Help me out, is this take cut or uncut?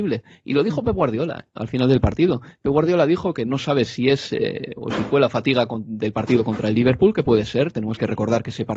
uncut